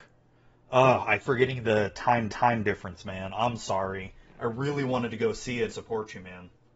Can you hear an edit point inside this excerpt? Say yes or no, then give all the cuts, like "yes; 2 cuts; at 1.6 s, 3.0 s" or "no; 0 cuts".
yes; 3 cuts; at 1.2 s, 2.3 s, 5.7 s